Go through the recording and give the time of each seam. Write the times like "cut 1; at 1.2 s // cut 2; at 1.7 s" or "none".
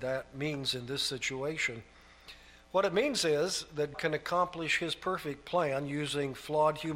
cut 1; at 3.9 s

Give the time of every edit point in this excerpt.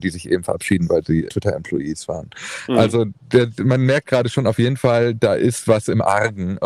cut 1; at 1.3 s

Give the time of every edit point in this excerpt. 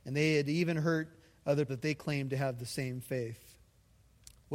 cut 1; at 1.7 s

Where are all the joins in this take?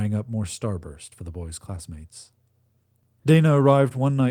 none

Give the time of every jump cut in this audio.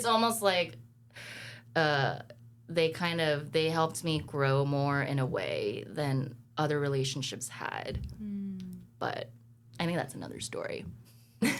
cut 1; at 6.4 s

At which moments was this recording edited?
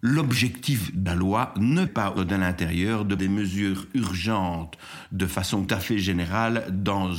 cut 1; at 1.1 s // cut 2; at 1.9 s // cut 3; at 2.2 s // cut 4; at 3.2 s // cut 5; at 5.7 s

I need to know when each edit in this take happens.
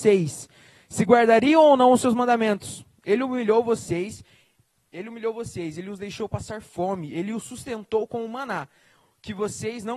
none

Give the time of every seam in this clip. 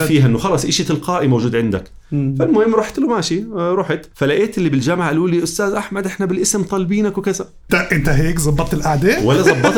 cut 1; at 2.9 s // cut 2; at 4.1 s // cut 3; at 7.7 s

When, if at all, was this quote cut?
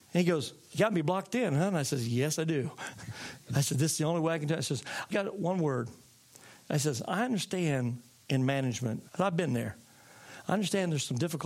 cut 1; at 5.1 s // cut 2; at 9.1 s

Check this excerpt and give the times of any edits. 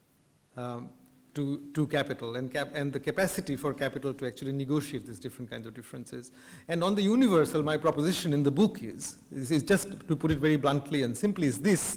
none

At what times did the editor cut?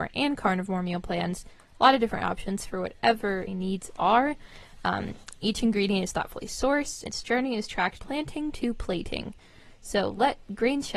cut 1; at 3.5 s // cut 2; at 7.1 s // cut 3; at 8.0 s

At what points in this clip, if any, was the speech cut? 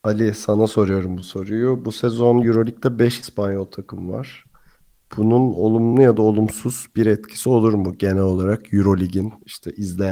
none

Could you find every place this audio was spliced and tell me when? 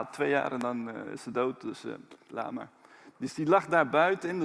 none

